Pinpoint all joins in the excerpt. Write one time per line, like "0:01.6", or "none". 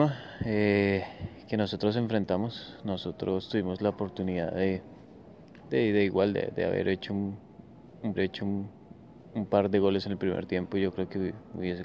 0:08.2